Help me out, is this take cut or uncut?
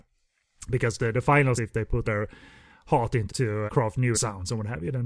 cut